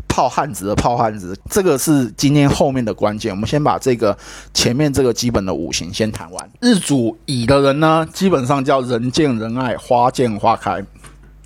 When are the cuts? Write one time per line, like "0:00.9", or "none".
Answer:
0:06.6